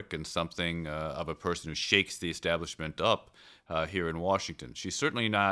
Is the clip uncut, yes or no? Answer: yes